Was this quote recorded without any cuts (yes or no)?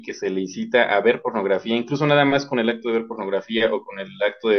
yes